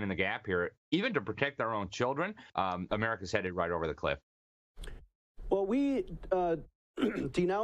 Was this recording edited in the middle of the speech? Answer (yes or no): yes